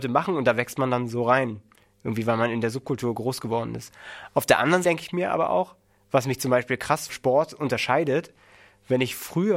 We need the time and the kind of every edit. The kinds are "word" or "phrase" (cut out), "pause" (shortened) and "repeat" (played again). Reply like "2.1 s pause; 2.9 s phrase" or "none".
4.8 s word; 7.1 s word